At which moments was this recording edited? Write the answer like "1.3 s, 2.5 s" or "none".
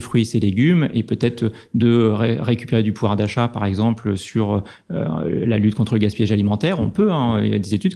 none